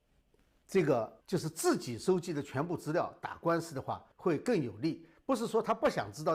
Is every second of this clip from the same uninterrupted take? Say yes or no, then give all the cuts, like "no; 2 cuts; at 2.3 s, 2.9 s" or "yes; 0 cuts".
no; 2 cuts; at 1.2 s, 4.1 s